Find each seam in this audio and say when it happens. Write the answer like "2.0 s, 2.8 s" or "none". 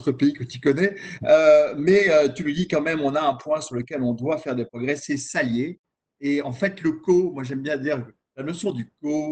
none